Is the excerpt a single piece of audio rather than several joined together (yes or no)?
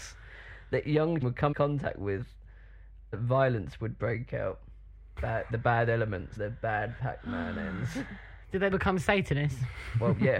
no